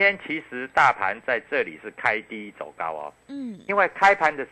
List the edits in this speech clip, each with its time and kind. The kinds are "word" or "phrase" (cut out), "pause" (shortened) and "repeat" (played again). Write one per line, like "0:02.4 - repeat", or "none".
none